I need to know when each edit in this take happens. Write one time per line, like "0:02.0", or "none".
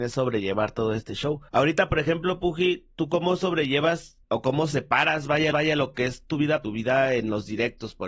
0:01.5
0:04.2
0:05.5
0:06.6